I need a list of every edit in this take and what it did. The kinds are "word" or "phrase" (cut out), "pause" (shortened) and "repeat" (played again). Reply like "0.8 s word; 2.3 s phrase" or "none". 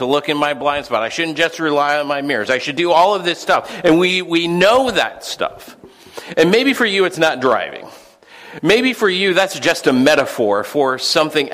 none